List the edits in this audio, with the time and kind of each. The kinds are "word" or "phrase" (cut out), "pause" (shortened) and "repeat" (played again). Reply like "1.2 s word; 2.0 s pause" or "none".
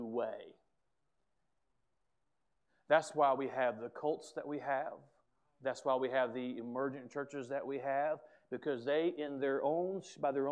none